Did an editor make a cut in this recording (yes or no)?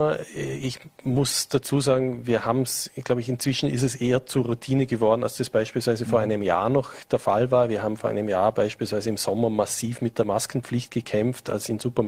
no